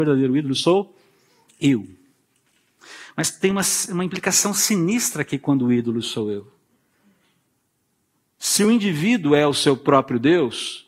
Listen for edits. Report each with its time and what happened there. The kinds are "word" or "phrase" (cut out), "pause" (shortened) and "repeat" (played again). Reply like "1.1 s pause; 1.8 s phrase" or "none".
none